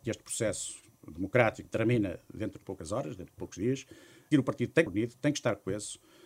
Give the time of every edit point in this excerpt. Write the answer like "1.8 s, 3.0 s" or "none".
1.6 s, 2.6 s, 4.3 s, 4.9 s